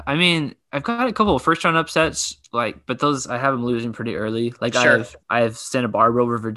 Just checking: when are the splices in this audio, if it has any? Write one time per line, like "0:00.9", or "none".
0:05.2